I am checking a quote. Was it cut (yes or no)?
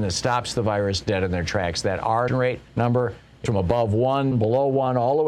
yes